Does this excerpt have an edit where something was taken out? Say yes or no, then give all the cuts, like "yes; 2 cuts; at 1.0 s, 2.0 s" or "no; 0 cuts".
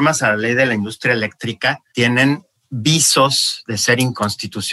yes; 1 cut; at 1.9 s